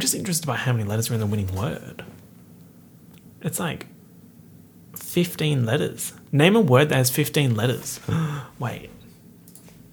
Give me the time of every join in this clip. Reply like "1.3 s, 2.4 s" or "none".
none